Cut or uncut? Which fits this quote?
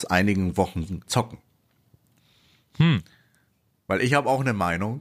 cut